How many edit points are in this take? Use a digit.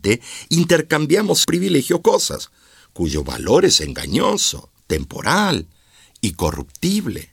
3